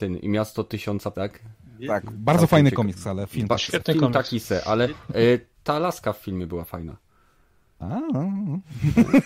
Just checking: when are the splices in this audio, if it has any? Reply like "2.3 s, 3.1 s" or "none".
1.1 s